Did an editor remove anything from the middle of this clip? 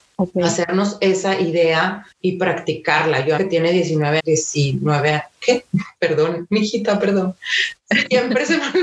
yes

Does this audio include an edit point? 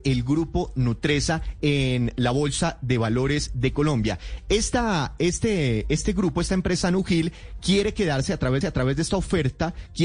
yes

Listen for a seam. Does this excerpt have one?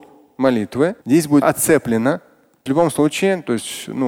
yes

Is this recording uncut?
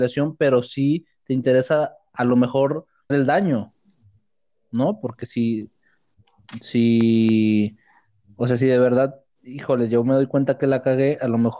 no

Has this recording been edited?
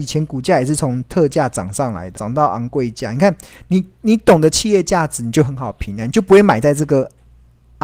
yes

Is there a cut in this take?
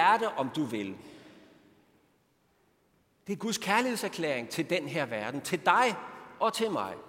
no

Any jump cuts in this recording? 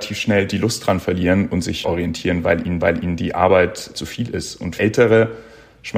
yes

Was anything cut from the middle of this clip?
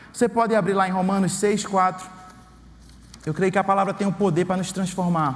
no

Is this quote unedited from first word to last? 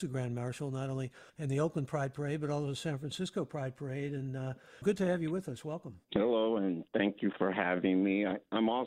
no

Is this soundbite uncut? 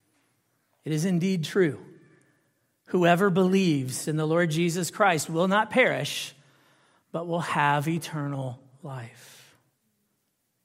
yes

